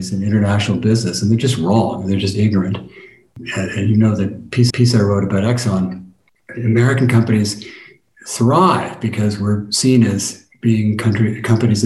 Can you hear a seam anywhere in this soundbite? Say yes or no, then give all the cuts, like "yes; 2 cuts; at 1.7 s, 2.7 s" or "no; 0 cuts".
yes; 1 cut; at 4.7 s